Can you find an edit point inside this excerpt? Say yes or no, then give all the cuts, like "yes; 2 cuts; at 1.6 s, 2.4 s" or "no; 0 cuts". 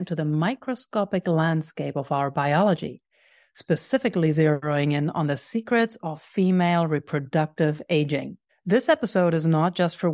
yes; 1 cut; at 8.5 s